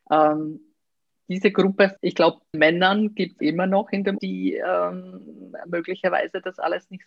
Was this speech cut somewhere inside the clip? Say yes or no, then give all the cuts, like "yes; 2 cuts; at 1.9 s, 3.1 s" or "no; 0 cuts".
yes; 5 cuts; at 1.1 s, 2.0 s, 2.5 s, 3.4 s, 4.2 s